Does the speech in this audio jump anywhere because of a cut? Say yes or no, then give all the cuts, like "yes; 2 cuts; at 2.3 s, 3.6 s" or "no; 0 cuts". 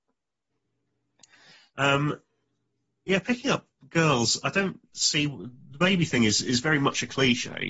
no; 0 cuts